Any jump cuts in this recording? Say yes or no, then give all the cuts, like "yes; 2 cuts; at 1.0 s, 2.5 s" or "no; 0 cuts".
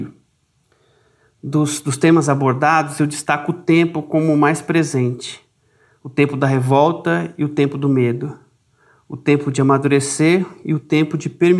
no; 0 cuts